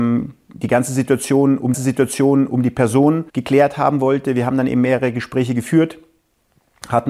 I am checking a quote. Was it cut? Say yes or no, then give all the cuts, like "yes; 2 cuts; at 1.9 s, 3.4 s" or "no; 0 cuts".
yes; 2 cuts; at 1.7 s, 3.3 s